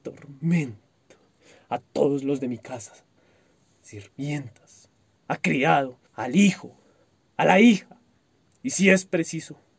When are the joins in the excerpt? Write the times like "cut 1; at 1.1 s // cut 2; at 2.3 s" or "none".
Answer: cut 1; at 6.1 s